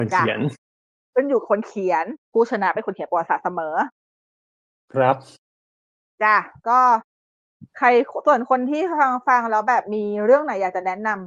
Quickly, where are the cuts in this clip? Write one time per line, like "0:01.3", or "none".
0:02.2
0:06.6